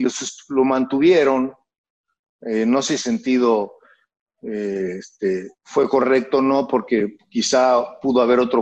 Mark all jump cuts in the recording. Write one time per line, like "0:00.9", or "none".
0:03.0
0:05.5